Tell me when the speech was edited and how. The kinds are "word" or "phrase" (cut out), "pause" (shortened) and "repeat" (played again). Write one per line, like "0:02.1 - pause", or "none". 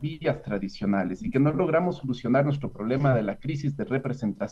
none